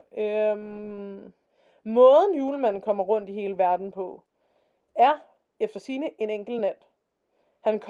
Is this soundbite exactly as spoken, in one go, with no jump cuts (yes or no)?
yes